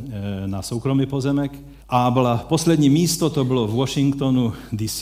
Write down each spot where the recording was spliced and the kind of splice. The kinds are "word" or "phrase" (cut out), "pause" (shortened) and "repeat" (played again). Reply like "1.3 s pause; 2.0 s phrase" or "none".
1.8 s pause